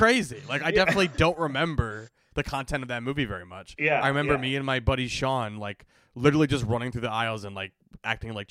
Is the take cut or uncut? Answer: uncut